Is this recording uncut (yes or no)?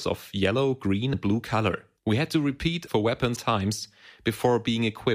no